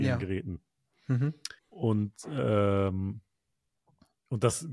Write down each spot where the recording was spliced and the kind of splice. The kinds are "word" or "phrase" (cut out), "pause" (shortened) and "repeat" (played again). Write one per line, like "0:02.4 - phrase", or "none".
0:01.6 - pause